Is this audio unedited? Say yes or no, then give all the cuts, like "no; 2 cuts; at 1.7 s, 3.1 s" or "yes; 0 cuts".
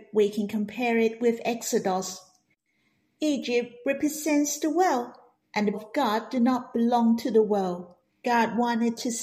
no; 2 cuts; at 5.7 s, 8.1 s